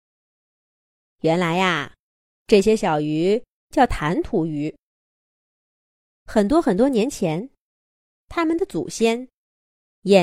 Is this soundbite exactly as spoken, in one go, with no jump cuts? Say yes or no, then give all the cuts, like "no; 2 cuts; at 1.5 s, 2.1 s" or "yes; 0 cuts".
yes; 0 cuts